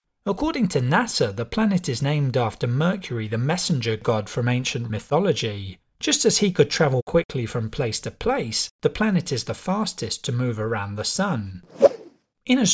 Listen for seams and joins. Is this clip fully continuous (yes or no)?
no